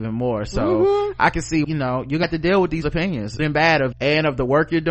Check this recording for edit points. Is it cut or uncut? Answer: cut